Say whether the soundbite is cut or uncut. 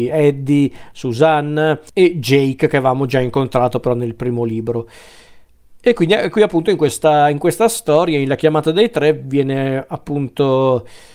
uncut